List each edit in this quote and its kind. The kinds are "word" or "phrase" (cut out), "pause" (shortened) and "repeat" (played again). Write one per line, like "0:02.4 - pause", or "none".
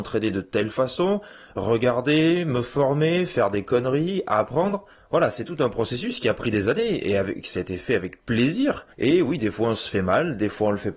0:04.9 - pause
0:08.9 - pause